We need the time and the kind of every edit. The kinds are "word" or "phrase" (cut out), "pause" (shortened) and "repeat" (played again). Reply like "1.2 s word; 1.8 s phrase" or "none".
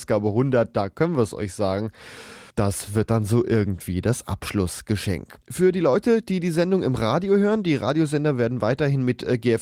2.5 s pause; 5.4 s pause